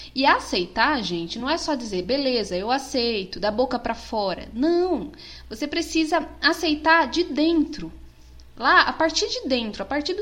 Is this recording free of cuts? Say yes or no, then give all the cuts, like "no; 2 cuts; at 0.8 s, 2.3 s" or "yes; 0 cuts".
yes; 0 cuts